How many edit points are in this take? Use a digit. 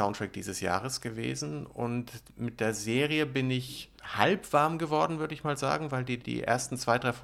2